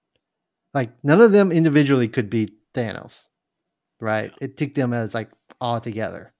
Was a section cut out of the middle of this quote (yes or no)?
yes